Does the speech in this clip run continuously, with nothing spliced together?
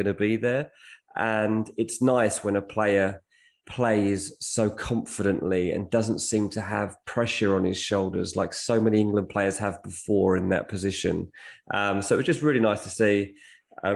yes; 0 cuts

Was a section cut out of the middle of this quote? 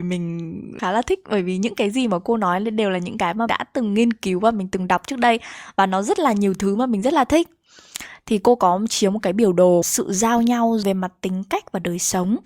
yes; 2 cuts; at 3.5 s, 9.8 s

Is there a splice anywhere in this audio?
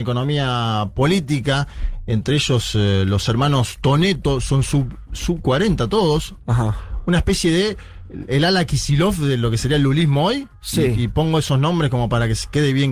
no; 0 cuts

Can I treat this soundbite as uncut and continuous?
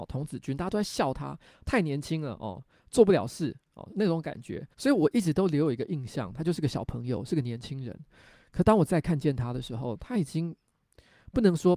no; 1 cut; at 4.7 s

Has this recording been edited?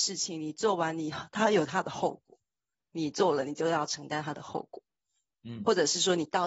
no; 0 cuts

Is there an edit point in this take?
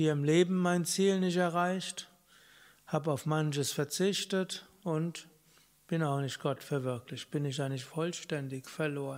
no; 0 cuts

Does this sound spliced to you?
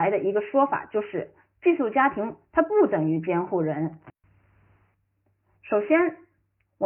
no; 0 cuts

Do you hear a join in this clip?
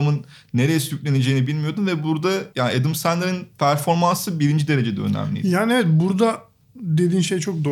yes; 1 cut; at 2.5 s

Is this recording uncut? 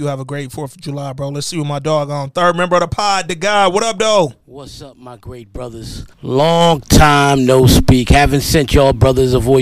no; 2 cuts; at 4.4 s, 6.1 s

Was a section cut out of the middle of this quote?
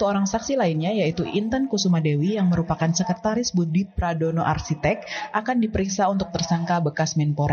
no; 0 cuts

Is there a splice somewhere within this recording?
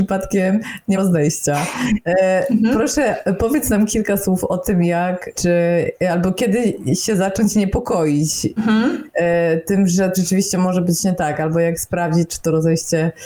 yes; 4 cuts; at 0.9 s, 5.3 s, 8.6 s, 10.1 s

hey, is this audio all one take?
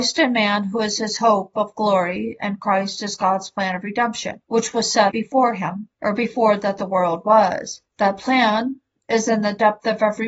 no; 4 cuts; at 4.4 s, 5.1 s, 5.9 s, 7.9 s

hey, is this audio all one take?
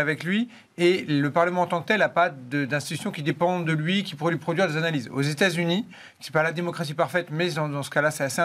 yes; 0 cuts

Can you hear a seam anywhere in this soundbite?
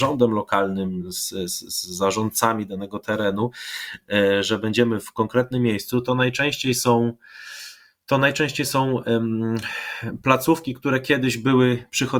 no; 0 cuts

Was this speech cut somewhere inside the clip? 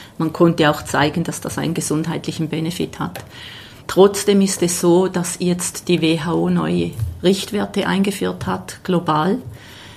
yes; 1 cut; at 3.8 s

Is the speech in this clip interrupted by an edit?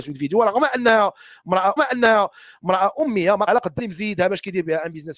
yes; 3 cuts; at 1.8 s, 3.5 s, 3.8 s

